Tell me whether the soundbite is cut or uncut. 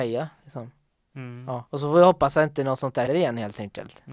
cut